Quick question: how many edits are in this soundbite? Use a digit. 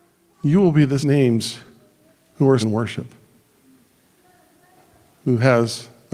2